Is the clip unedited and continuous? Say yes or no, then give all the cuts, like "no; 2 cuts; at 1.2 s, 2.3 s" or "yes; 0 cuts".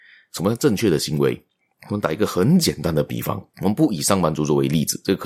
no; 2 cuts; at 1.7 s, 3.5 s